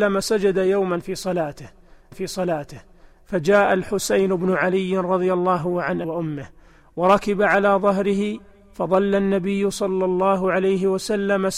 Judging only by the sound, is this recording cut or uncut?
cut